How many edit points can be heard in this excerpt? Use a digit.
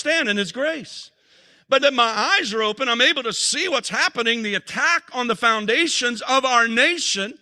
1